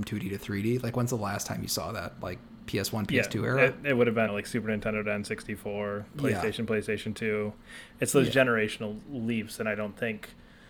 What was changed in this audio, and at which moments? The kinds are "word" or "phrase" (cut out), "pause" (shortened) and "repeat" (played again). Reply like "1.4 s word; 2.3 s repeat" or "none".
4.3 s word; 6.1 s pause